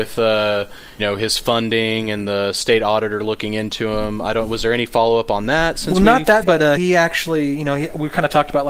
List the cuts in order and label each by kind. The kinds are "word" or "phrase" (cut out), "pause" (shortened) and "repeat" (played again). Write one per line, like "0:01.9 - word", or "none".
0:01.0 - word
0:06.4 - word
0:06.8 - word